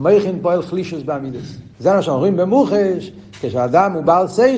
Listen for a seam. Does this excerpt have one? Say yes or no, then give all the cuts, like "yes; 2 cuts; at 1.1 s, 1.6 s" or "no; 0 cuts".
yes; 1 cut; at 1.7 s